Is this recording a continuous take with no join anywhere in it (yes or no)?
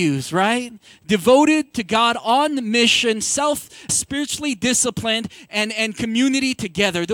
no